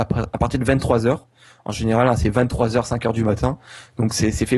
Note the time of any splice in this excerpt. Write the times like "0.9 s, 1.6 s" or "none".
none